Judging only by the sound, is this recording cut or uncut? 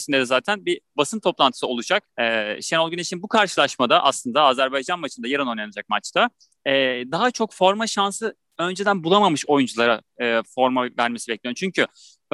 cut